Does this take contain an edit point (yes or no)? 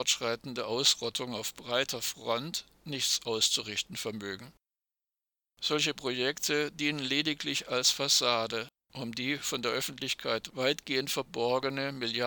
no